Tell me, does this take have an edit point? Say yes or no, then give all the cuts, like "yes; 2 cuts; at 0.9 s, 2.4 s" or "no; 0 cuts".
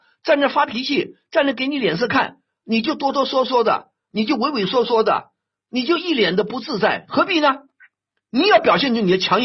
no; 0 cuts